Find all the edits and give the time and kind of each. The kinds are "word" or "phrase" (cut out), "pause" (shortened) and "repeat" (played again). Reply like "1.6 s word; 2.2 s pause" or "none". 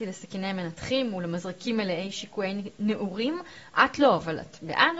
none